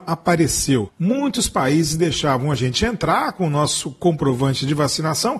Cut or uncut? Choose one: uncut